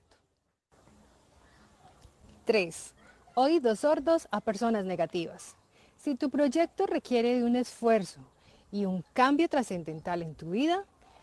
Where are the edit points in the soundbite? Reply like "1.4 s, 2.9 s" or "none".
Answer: none